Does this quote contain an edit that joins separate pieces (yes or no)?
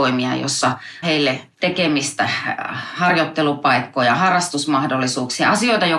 yes